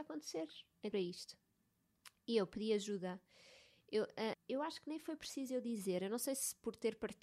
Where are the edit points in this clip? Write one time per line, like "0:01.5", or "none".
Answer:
0:00.9
0:04.3